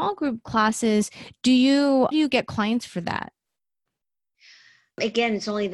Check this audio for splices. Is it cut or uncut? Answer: cut